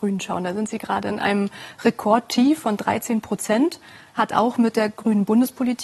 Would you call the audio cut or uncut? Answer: uncut